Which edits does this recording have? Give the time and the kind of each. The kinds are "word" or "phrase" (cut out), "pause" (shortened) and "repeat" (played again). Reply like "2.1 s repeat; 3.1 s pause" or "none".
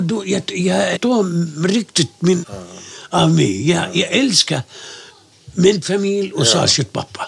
1.0 s word; 2.4 s word